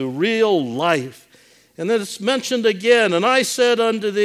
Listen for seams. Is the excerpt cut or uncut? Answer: uncut